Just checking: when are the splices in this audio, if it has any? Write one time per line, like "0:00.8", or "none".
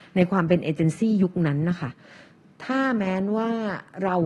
none